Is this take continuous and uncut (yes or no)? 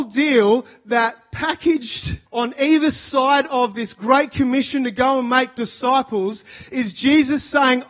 no